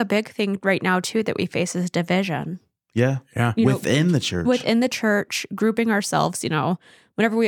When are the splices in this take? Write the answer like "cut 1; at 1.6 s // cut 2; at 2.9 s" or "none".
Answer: none